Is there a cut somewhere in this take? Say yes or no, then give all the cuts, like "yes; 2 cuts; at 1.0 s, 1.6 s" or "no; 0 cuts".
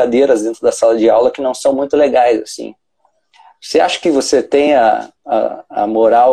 no; 0 cuts